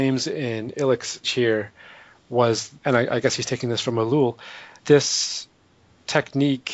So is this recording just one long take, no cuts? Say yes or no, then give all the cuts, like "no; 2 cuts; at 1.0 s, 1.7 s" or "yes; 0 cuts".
no; 3 cuts; at 1.2 s, 2.8 s, 4.8 s